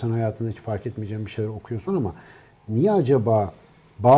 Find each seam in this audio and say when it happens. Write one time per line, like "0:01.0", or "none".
0:01.9